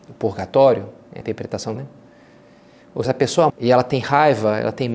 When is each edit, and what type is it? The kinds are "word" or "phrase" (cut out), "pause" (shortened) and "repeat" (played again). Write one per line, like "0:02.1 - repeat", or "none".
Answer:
0:01.2 - word
0:01.8 - word
0:03.0 - word
0:03.5 - word